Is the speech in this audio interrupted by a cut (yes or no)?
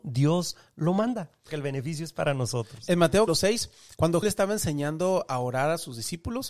yes